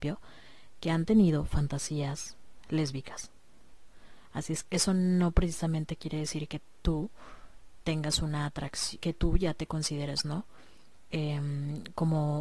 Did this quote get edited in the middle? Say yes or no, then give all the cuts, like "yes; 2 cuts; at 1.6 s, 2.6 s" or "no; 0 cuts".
yes; 2 cuts; at 4.6 s, 9.0 s